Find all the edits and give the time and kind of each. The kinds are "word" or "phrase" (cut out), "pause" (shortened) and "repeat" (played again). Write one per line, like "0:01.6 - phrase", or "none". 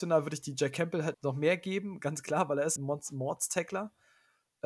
0:01.1 - word
0:02.8 - word